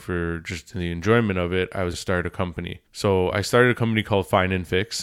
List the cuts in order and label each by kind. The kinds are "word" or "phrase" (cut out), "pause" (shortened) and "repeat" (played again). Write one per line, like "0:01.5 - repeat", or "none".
0:01.9 - word
0:02.9 - pause